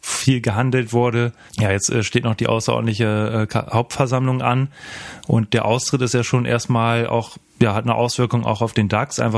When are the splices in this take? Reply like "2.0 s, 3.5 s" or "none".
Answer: none